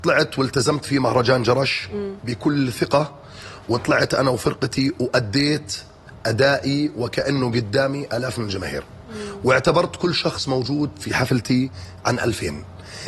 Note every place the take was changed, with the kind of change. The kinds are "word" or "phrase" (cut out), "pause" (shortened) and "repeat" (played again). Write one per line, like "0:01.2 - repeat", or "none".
none